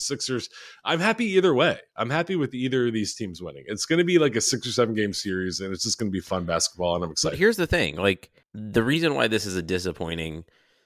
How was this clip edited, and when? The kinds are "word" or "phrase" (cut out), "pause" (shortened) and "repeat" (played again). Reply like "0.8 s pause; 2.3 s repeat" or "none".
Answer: 8.4 s pause